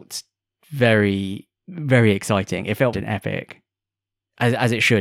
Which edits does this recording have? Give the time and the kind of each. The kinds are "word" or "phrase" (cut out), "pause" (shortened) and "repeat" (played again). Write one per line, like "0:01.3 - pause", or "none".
0:01.6 - pause
0:02.9 - phrase